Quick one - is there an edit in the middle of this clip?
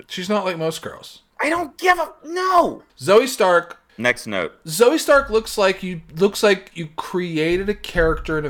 yes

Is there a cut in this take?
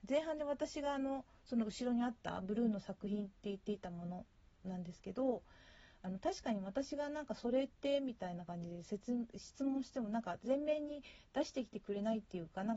no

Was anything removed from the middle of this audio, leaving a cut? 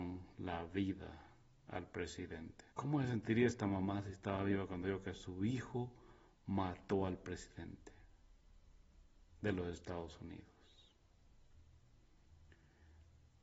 yes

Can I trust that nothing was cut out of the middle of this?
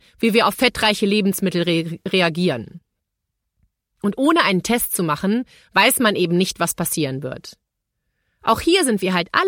yes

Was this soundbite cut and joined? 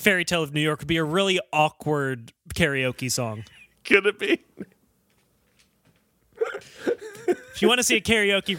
no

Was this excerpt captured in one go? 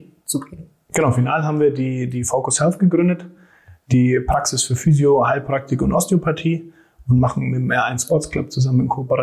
yes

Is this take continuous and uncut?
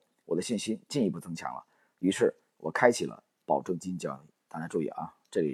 yes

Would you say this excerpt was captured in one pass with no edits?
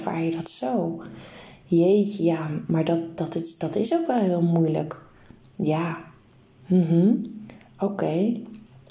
yes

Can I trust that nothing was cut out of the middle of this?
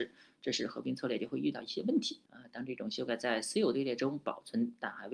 no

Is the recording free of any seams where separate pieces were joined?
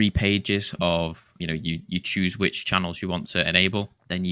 yes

